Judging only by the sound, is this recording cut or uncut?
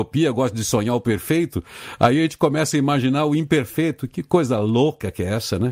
uncut